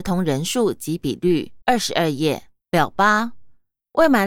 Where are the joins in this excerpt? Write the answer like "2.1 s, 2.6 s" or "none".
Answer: 1.6 s, 2.6 s